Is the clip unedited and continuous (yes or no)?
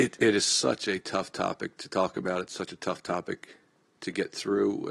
yes